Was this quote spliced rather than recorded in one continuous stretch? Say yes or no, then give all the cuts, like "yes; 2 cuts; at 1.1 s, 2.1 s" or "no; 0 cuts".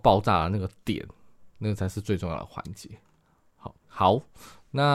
yes; 1 cut; at 3.8 s